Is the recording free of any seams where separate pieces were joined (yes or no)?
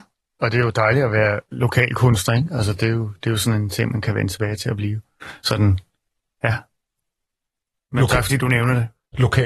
yes